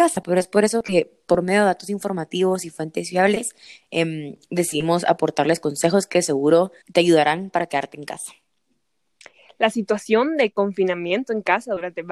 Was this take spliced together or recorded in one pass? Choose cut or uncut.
cut